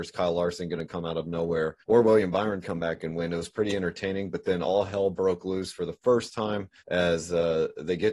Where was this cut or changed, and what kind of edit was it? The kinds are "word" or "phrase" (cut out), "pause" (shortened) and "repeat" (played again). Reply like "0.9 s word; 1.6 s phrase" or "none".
1.8 s pause; 2.6 s phrase; 6.8 s pause